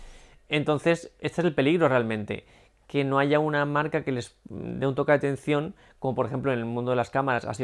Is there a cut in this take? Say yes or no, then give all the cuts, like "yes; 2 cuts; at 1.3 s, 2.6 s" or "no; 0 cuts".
no; 0 cuts